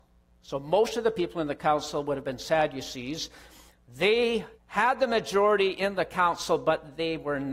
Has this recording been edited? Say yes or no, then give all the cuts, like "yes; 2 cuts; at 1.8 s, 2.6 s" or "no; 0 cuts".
yes; 1 cut; at 4.5 s